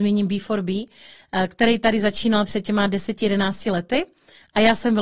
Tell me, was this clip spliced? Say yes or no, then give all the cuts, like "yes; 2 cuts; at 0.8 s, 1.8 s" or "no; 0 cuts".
no; 0 cuts